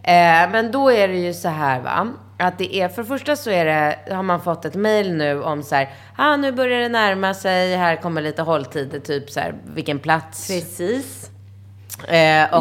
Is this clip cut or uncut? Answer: uncut